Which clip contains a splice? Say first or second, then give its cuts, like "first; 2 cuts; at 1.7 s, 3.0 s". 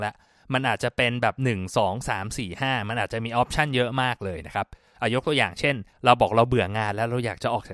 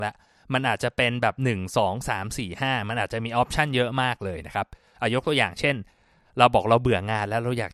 first; 1 cut; at 5.9 s